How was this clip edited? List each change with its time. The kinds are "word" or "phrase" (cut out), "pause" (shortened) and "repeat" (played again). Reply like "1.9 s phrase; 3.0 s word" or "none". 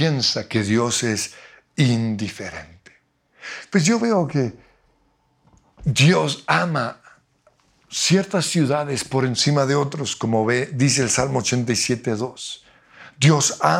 none